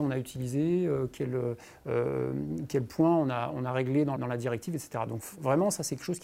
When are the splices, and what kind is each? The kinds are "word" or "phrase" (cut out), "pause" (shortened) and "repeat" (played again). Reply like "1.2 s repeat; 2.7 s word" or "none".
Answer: 4.2 s word